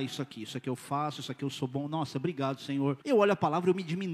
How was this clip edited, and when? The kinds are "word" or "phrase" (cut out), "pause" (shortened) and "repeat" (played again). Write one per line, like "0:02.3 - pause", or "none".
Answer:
0:03.0 - pause